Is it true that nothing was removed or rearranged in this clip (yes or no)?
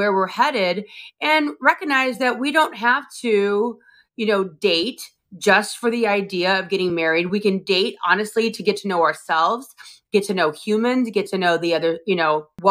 yes